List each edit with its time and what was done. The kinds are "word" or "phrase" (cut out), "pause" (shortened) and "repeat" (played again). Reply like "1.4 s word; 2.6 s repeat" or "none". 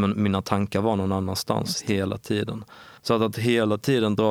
3.0 s pause